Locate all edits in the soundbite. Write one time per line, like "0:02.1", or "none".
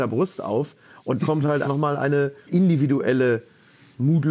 0:01.2
0:01.6
0:02.5